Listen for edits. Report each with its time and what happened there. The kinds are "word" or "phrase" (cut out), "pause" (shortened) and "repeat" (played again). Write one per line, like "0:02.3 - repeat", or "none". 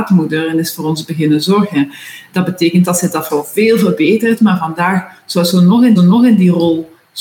0:03.3 - word
0:06.0 - repeat